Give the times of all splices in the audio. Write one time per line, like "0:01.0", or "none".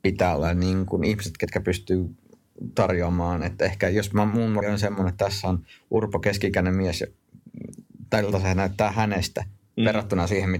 0:04.6